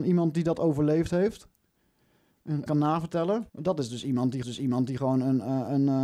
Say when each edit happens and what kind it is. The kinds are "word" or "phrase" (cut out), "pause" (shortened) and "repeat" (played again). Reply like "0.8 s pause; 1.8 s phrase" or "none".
2.7 s phrase; 3.5 s pause; 4.4 s repeat